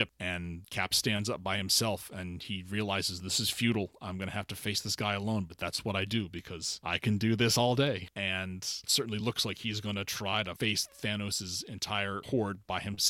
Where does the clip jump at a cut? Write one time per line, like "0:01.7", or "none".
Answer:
none

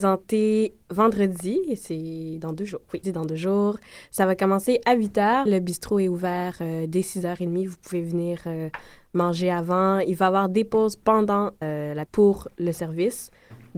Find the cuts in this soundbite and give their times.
0:03.0
0:05.5
0:11.6
0:12.1

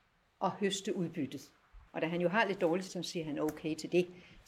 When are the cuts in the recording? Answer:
0:01.9
0:02.9

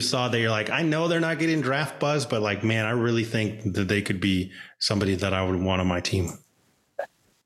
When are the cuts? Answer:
none

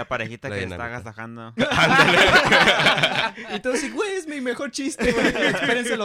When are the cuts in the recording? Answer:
none

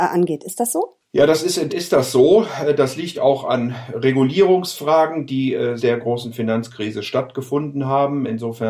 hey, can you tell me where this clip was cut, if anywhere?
0:01.7
0:03.1
0:05.8

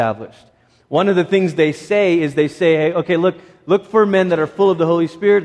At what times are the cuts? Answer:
none

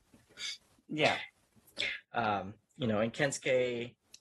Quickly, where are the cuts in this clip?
none

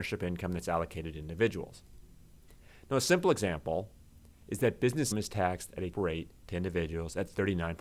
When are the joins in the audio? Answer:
0:05.1
0:05.9

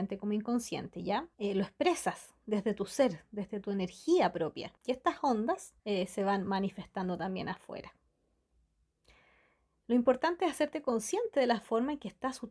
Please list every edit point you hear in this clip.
0:01.3
0:04.8
0:05.8

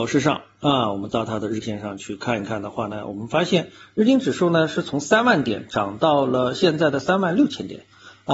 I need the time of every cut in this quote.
0:01.6

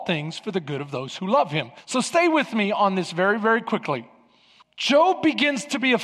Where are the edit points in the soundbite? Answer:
0:01.8
0:04.6

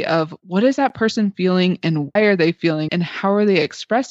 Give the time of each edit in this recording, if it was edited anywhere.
0:02.2
0:02.9

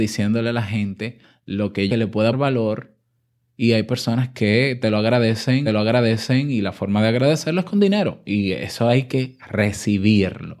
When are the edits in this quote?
0:01.9
0:02.3
0:05.7

